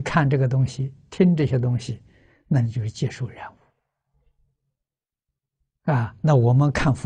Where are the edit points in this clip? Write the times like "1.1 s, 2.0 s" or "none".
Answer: none